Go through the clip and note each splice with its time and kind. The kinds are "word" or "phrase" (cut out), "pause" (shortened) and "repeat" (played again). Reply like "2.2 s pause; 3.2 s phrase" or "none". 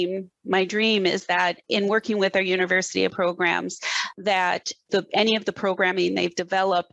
1.6 s pause; 3.1 s word